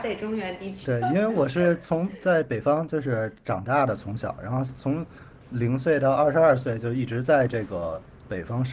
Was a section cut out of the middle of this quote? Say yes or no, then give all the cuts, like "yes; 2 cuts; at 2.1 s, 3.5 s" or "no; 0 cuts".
no; 0 cuts